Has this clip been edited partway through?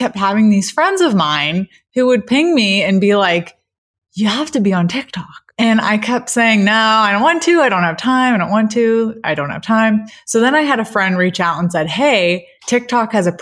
no; 0 cuts

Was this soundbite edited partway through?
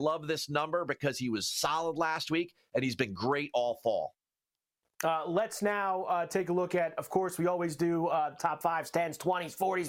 no; 0 cuts

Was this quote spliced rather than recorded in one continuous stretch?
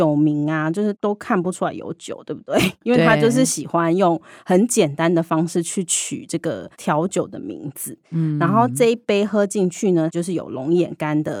yes; 1 cut; at 6.7 s

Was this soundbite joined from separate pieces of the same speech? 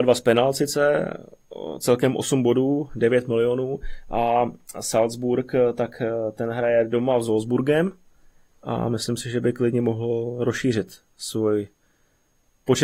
no; 0 cuts

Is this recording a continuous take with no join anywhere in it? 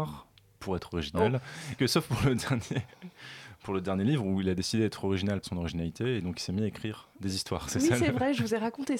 no; 2 cuts; at 1.8 s, 5.4 s

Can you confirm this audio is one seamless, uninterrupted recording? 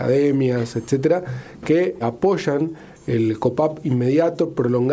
no; 1 cut; at 2.0 s

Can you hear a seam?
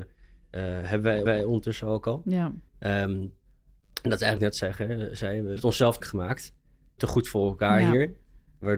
yes; 6 cuts; at 1.3 s, 2.7 s, 4.4 s, 5.6 s, 6.0 s, 7.0 s

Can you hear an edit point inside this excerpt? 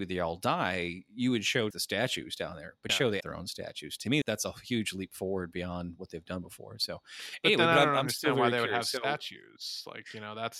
yes; 4 cuts; at 1.7 s, 2.9 s, 3.2 s, 4.2 s

